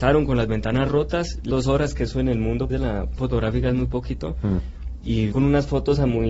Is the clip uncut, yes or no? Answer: no